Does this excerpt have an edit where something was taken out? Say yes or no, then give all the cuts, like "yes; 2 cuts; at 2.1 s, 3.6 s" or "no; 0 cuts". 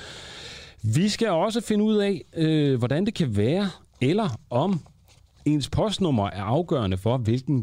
no; 0 cuts